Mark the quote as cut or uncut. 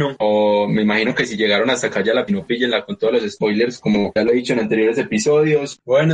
cut